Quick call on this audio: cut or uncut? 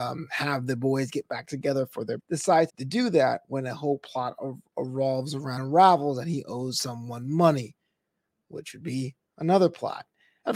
cut